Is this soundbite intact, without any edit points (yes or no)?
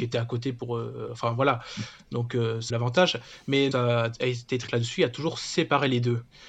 no